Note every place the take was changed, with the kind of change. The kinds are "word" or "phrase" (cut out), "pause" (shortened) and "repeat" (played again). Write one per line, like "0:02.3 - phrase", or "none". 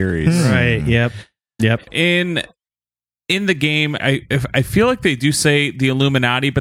0:01.9 - word
0:04.0 - word